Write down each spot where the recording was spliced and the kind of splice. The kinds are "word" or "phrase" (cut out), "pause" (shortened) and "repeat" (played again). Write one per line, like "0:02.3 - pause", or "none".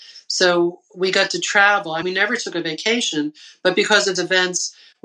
0:02.0 - word
0:04.2 - word